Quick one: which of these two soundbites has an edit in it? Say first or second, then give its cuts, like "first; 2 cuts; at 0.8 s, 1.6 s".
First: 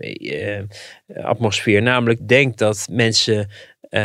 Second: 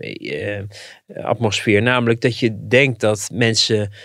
first; 1 cut; at 2.2 s